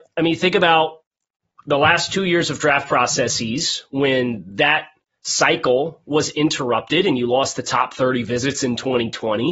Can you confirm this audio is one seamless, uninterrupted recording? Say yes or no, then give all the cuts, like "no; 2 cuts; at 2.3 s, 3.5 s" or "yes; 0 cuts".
yes; 0 cuts